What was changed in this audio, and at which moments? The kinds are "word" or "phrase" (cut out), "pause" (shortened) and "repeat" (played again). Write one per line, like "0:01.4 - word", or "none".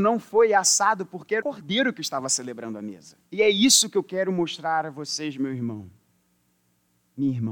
0:01.4 - phrase
0:03.3 - pause